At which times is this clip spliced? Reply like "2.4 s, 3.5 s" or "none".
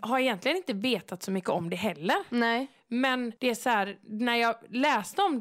3.4 s

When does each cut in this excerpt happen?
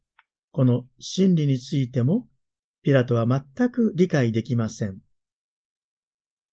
none

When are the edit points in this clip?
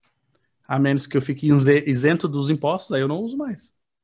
none

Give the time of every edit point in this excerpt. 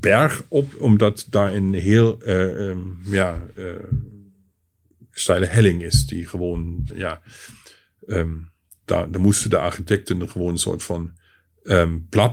6.9 s

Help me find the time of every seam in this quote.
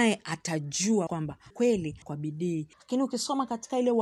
1.1 s, 1.5 s, 2.0 s, 2.7 s

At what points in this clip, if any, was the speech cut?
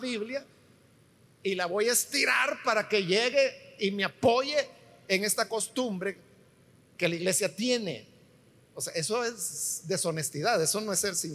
none

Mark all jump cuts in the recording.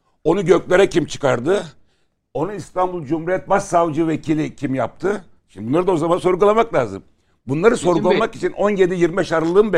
none

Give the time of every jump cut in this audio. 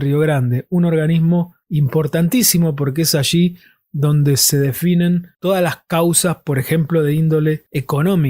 none

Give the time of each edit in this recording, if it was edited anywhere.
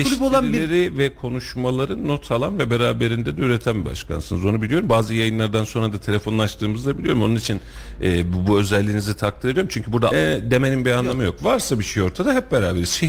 10.1 s

